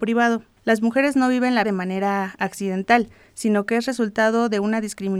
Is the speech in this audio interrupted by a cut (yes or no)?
yes